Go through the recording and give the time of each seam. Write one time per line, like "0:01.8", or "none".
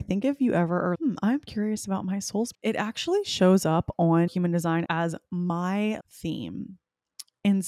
0:00.9
0:02.5
0:04.3
0:04.9
0:06.0